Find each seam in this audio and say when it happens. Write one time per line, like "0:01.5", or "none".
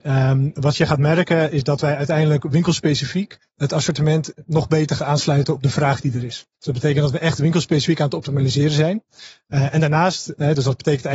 0:05.0
0:06.5